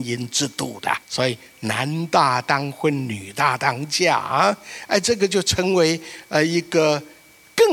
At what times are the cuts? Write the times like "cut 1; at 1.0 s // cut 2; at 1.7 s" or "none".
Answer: cut 1; at 1.0 s